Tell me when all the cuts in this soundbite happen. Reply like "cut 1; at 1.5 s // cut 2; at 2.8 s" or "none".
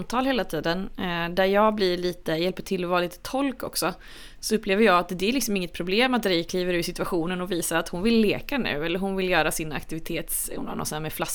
none

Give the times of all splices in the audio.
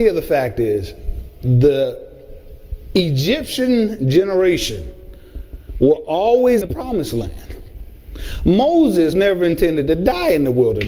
cut 1; at 6.6 s // cut 2; at 9.1 s

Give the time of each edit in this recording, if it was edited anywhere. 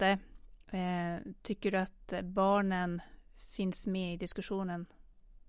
none

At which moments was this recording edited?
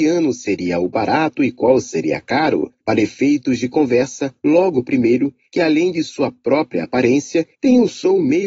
cut 1; at 7.5 s

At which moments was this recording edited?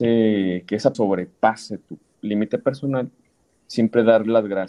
cut 1; at 0.9 s

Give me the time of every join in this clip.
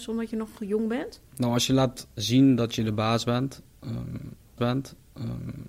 cut 1; at 1.3 s // cut 2; at 4.6 s

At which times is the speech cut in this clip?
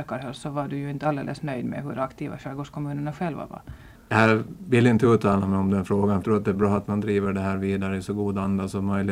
cut 1; at 6.2 s

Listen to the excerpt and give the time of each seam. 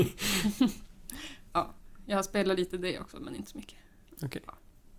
none

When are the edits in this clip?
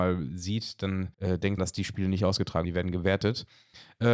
cut 1; at 1.1 s // cut 2; at 1.6 s // cut 3; at 2.6 s

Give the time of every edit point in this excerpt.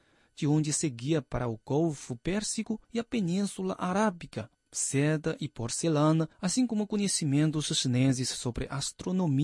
cut 1; at 2.8 s // cut 2; at 4.5 s // cut 3; at 6.3 s

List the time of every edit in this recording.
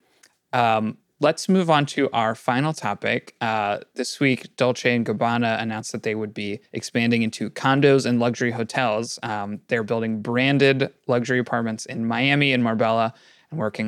cut 1; at 6.7 s

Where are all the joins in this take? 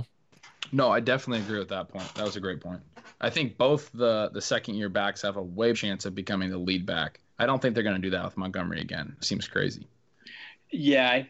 cut 1; at 5.7 s // cut 2; at 7.3 s // cut 3; at 9.2 s

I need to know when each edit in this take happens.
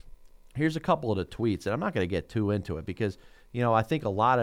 none

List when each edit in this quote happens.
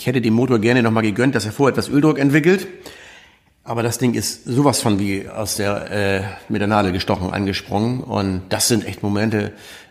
none

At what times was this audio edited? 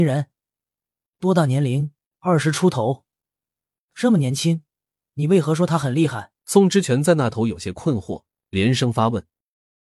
cut 1; at 2.0 s // cut 2; at 6.4 s

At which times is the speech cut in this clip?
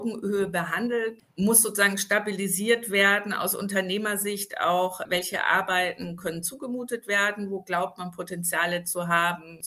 none

